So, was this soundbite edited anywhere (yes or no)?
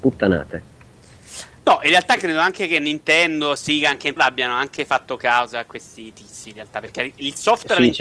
yes